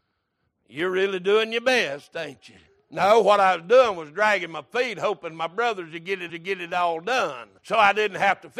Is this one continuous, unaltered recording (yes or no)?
no